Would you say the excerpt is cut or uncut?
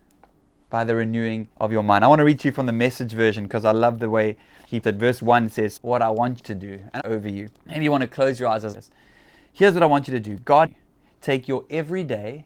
cut